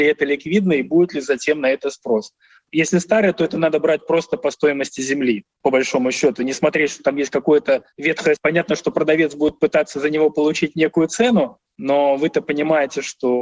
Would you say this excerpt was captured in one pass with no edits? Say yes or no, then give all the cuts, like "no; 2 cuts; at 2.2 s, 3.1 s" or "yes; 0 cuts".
no; 1 cut; at 8.4 s